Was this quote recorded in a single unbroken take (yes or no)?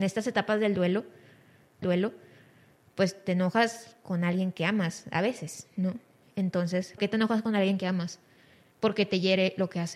no